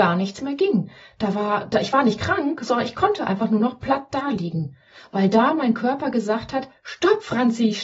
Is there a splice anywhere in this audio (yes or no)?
no